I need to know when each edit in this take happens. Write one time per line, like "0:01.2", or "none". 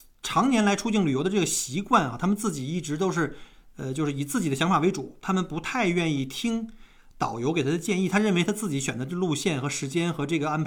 none